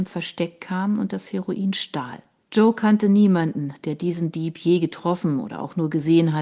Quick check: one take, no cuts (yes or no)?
no